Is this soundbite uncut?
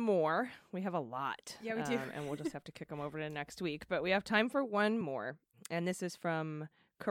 yes; 0 cuts

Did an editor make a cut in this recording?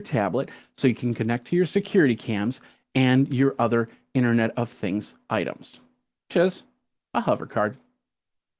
yes; 1 cut; at 6.3 s

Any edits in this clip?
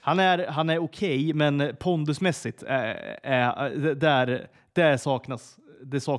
no; 0 cuts

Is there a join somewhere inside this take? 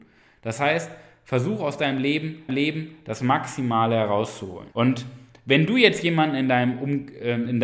yes; 2 cuts; at 2.5 s, 4.7 s

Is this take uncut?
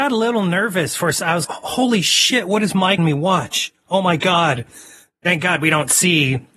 no; 2 cuts; at 1.4 s, 3.0 s

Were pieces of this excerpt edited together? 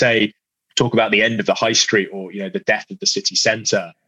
no; 0 cuts

